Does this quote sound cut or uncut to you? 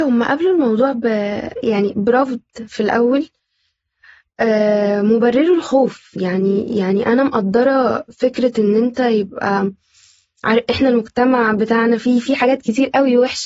uncut